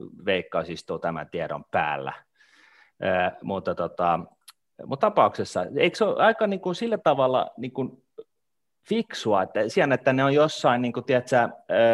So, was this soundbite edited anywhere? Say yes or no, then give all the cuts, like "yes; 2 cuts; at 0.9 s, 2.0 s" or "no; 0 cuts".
yes; 2 cuts; at 5.0 s, 9.7 s